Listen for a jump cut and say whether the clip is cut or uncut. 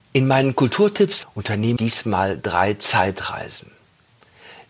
cut